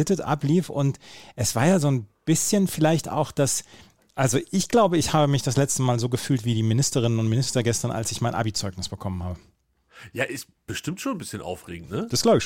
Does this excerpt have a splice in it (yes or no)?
no